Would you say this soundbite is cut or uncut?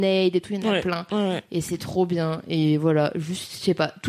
uncut